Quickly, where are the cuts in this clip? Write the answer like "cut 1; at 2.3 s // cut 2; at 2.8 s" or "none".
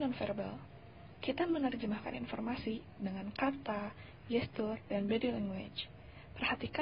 none